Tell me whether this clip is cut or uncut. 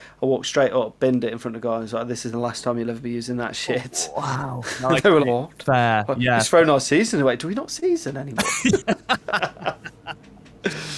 cut